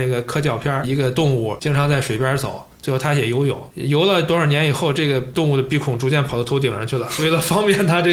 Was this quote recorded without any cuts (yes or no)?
yes